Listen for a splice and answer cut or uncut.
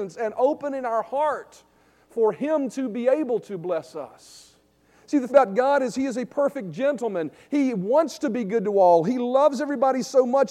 cut